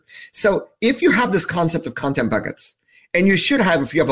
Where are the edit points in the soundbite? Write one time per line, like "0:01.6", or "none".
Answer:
none